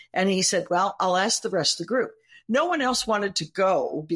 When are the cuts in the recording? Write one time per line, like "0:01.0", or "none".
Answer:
none